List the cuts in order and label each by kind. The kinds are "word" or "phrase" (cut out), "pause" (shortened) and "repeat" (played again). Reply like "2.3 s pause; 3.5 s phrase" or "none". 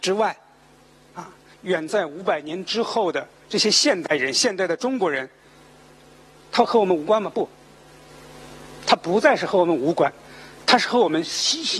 1.5 s pause